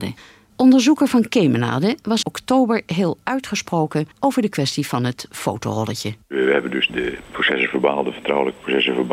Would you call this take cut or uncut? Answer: cut